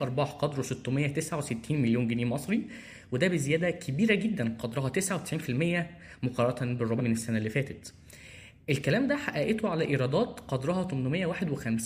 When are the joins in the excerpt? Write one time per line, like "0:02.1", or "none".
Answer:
0:07.0